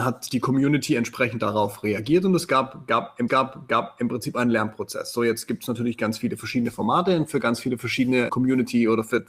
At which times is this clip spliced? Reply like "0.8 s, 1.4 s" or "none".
3.3 s, 8.3 s